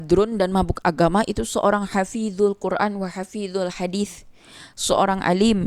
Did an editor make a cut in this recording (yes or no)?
no